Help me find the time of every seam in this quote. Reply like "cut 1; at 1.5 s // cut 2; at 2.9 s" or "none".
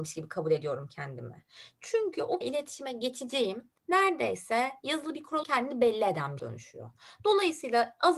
cut 1; at 2.4 s // cut 2; at 3.8 s // cut 3; at 5.4 s // cut 4; at 6.4 s